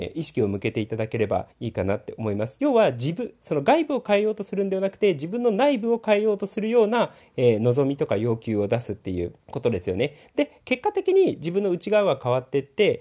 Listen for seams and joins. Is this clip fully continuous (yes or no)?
no